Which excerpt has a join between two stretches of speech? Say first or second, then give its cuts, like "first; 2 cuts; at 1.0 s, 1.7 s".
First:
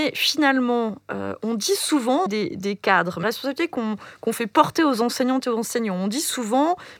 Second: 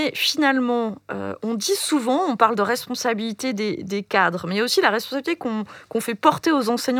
first; 2 cuts; at 2.3 s, 3.2 s